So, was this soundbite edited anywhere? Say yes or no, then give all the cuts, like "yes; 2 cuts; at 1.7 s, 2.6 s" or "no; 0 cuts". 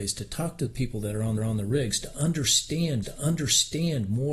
yes; 2 cuts; at 1.4 s, 3.0 s